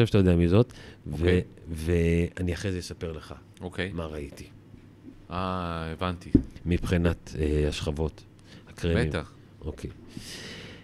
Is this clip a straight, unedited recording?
yes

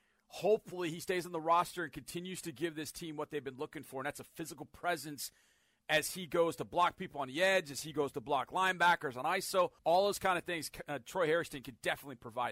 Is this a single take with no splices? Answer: no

